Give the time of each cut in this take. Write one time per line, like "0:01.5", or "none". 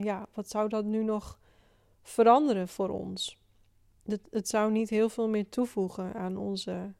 none